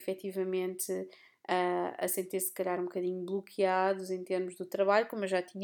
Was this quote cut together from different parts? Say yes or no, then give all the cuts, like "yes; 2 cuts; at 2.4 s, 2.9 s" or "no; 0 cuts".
no; 0 cuts